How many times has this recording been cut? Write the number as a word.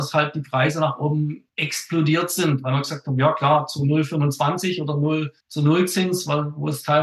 two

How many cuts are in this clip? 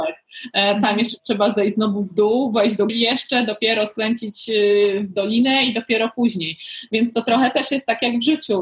one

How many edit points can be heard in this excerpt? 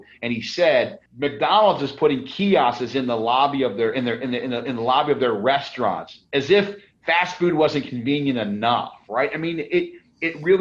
one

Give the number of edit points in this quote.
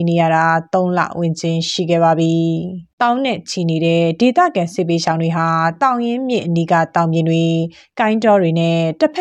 one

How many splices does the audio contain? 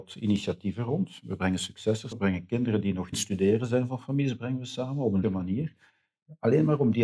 three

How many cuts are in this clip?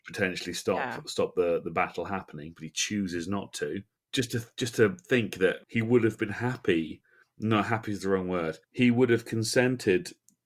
four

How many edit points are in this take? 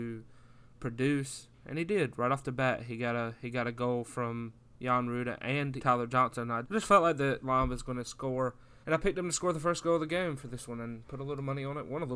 four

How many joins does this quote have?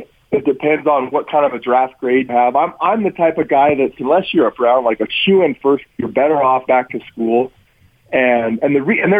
six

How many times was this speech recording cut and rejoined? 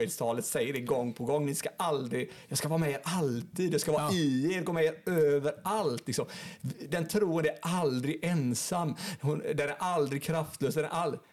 zero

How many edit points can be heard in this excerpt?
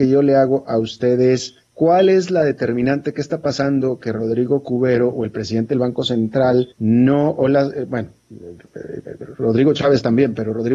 two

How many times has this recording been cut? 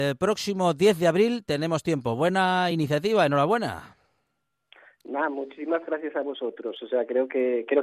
zero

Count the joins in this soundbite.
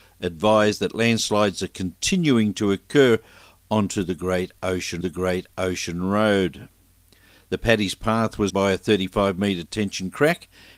two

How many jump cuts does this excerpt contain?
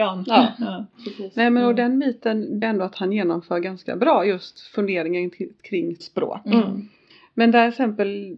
two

